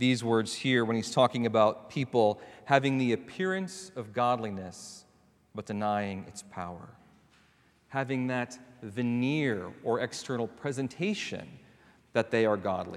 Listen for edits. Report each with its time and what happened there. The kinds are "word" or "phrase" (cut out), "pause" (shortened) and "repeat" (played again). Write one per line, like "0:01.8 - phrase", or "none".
none